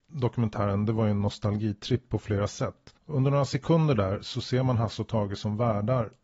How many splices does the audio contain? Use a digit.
1